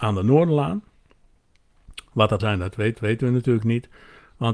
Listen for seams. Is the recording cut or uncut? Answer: cut